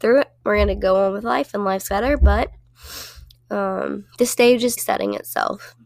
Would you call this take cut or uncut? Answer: cut